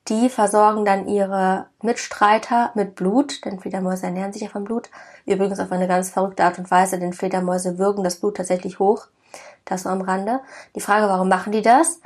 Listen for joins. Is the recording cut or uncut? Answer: uncut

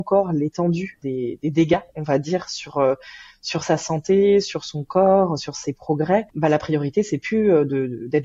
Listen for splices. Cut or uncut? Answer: uncut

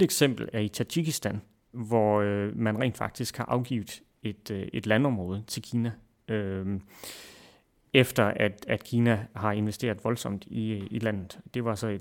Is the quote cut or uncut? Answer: uncut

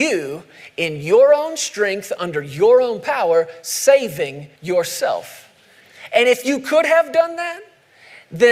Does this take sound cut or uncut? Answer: cut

